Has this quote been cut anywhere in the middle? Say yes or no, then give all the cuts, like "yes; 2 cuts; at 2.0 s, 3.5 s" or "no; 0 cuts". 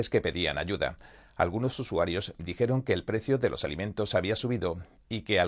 no; 0 cuts